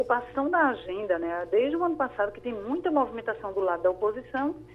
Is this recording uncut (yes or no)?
yes